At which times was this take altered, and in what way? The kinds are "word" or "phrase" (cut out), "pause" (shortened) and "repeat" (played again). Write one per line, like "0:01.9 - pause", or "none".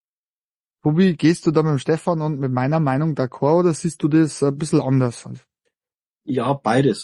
none